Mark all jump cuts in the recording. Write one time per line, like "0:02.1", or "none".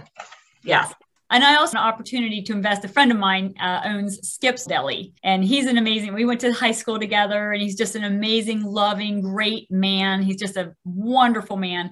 0:01.2
0:01.7
0:04.7
0:05.2